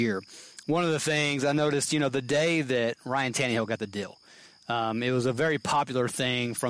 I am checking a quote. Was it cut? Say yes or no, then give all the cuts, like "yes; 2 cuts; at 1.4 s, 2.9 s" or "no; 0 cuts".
no; 0 cuts